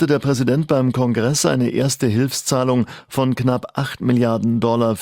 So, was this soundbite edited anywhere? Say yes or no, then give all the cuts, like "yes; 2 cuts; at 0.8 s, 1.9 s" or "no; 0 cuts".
no; 0 cuts